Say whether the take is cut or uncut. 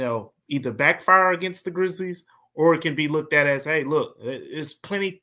uncut